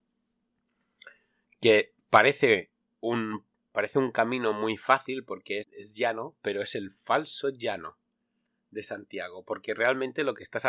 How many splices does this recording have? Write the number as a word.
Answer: one